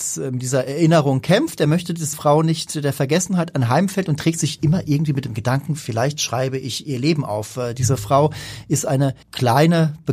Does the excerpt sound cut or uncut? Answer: cut